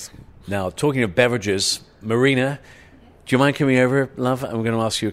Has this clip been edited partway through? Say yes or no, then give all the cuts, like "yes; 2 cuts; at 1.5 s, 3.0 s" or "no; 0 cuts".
no; 0 cuts